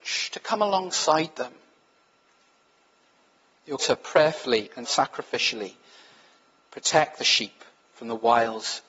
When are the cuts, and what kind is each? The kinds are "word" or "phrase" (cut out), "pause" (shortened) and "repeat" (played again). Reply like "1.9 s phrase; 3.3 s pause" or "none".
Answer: 3.8 s word; 4.8 s word; 7.7 s pause